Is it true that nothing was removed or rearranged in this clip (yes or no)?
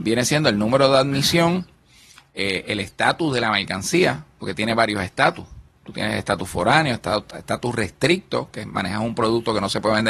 yes